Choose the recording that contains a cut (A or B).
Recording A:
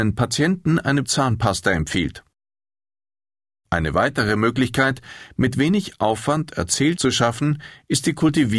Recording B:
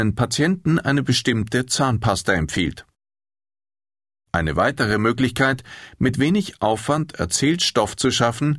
A